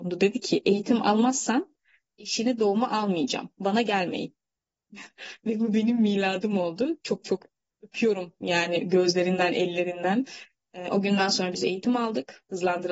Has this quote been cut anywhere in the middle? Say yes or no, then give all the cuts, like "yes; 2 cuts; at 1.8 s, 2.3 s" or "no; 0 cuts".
no; 0 cuts